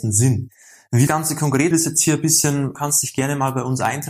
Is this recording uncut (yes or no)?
no